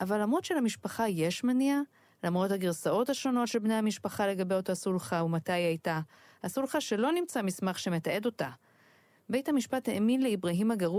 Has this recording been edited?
no; 0 cuts

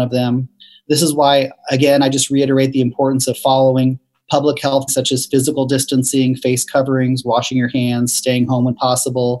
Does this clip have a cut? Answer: yes; 1 cut; at 4.9 s

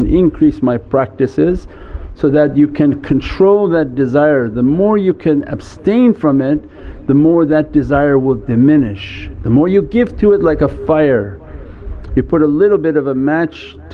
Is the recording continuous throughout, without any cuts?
yes; 0 cuts

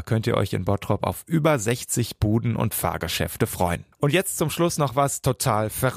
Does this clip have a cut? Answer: yes; 1 cut; at 3.9 s

